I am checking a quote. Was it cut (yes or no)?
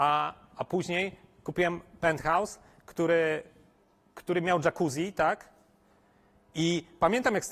no